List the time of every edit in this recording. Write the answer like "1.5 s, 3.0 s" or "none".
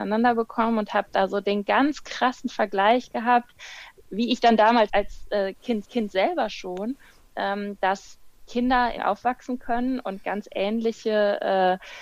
4.9 s, 5.8 s, 9.0 s